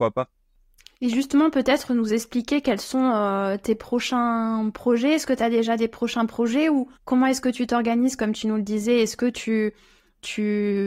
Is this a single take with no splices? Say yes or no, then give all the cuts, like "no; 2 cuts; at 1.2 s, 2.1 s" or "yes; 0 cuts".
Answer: no; 1 cut; at 6.9 s